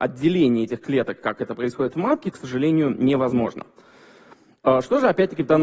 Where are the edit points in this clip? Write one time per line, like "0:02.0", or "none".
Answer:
0:02.3